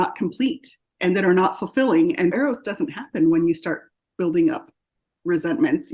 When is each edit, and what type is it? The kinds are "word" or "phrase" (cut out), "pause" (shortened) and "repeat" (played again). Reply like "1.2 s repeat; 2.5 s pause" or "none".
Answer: 2.3 s word